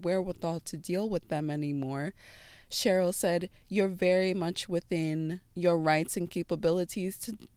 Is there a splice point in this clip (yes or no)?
yes